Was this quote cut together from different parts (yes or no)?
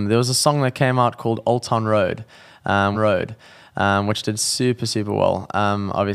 yes